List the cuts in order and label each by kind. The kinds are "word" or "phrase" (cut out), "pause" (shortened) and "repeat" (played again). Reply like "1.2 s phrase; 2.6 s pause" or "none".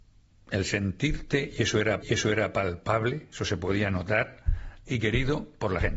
2.0 s repeat; 4.9 s word